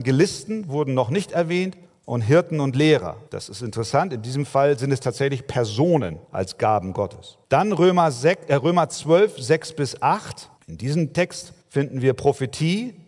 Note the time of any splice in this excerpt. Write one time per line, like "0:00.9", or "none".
0:01.8
0:03.3
0:06.2
0:07.4
0:10.6
0:11.6